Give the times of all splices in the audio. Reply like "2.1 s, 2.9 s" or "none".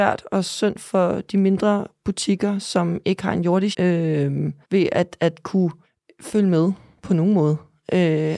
3.7 s, 4.6 s, 5.8 s